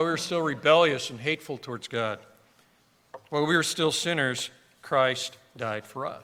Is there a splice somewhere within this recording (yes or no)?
no